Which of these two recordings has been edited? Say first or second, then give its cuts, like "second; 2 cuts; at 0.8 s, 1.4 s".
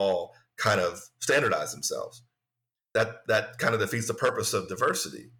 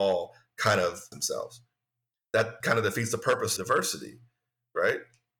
second; 3 cuts; at 1.1 s, 2.6 s, 3.6 s